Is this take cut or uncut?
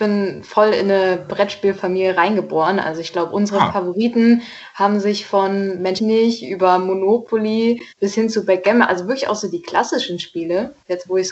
cut